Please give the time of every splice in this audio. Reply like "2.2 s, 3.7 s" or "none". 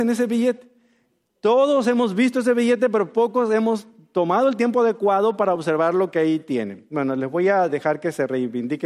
none